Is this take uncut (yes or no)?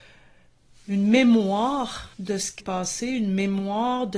no